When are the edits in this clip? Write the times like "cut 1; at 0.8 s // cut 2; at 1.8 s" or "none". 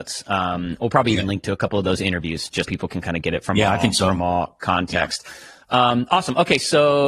cut 1; at 2.6 s